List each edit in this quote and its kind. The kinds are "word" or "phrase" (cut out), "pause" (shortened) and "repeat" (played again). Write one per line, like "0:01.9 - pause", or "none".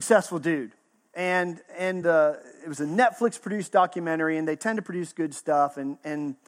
none